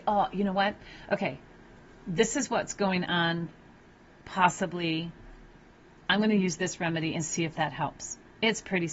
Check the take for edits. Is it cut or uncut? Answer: uncut